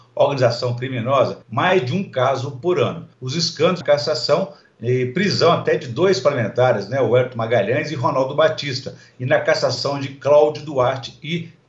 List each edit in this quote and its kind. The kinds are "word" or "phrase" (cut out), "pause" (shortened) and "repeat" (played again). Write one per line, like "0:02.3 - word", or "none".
0:01.4 - pause
0:03.1 - pause
0:03.8 - phrase